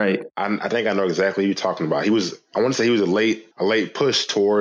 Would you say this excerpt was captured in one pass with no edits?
no; 1 cut; at 3.5 s

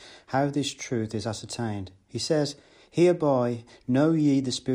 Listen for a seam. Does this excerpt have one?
no; 0 cuts

